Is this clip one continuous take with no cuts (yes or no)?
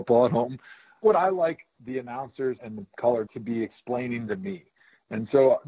no